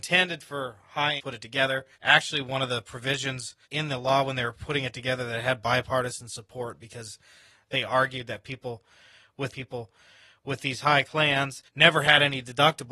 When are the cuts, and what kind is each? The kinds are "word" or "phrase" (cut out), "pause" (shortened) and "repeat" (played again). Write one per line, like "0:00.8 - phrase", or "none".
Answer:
0:01.2 - phrase
0:01.9 - pause
0:03.6 - pause
0:09.5 - repeat
0:11.0 - word
0:11.7 - pause

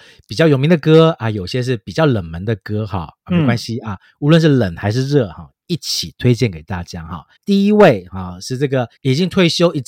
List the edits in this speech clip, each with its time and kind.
0:07.4 - pause
0:09.0 - pause

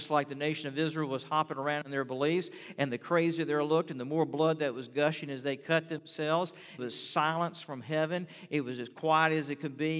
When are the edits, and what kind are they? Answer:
0:06.8 - word

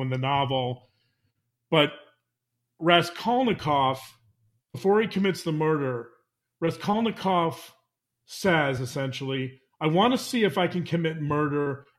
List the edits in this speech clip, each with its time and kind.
none

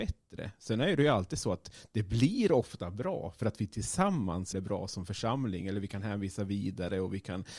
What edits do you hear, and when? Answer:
0:04.5 - word

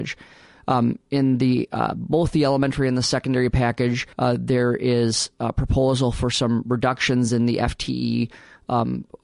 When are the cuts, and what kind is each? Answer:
0:04.1 - pause

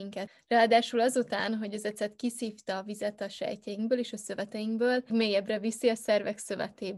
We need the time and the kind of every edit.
0:05.1 - word

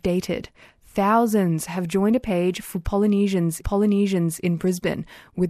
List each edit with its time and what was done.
0:03.6 - repeat

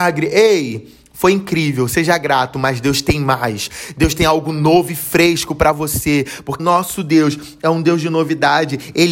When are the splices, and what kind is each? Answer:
0:06.6 - word

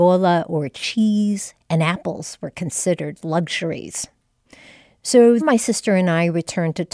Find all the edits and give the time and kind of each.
0:01.6 - word
0:05.4 - phrase

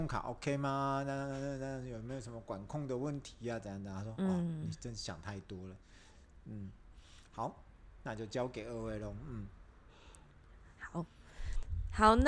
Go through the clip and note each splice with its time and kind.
none

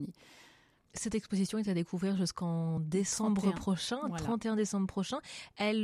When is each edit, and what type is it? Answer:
none

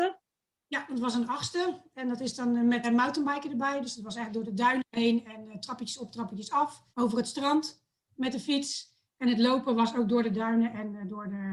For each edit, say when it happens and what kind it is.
0:02.8 - word
0:06.9 - pause

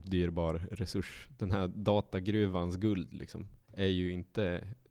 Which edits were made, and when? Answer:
0:03.6 - pause

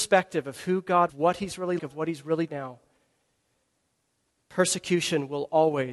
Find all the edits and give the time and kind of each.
0:01.1 - phrase
0:01.8 - word
0:02.5 - phrase

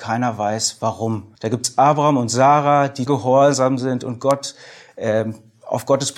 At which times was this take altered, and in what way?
0:01.4 - pause
0:03.1 - word

